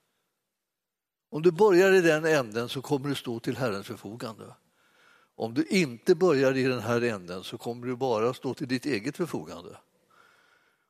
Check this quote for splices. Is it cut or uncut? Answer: uncut